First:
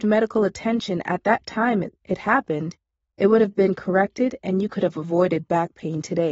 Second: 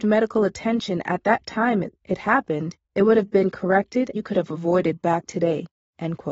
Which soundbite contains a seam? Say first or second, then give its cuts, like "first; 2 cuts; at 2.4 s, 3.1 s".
second; 3 cuts; at 2.8 s, 4.1 s, 5.3 s